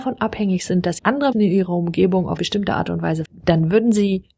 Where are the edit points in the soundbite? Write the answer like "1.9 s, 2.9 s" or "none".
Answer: 1.0 s, 1.3 s, 2.4 s, 3.2 s